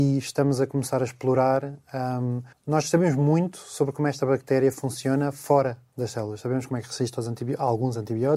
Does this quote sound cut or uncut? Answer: cut